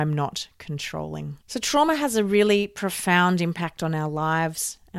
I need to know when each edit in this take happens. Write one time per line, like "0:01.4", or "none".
0:01.4